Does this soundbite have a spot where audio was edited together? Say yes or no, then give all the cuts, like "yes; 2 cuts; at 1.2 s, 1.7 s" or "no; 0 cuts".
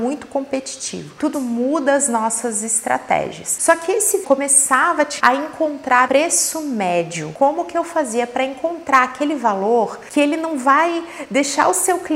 yes; 4 cuts; at 1.3 s, 4.2 s, 5.2 s, 6.1 s